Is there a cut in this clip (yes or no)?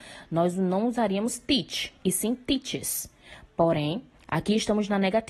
no